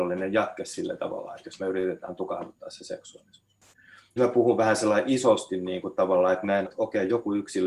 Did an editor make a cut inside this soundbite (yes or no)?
yes